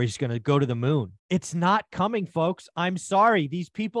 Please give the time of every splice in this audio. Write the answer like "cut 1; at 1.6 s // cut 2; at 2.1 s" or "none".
cut 1; at 1.2 s